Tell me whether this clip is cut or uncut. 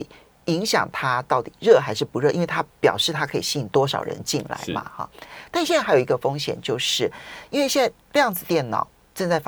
uncut